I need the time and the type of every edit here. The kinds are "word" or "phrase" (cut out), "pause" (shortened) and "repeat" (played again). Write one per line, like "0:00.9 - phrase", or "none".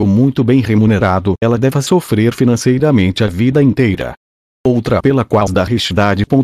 0:01.4 - word
0:05.0 - word
0:05.5 - word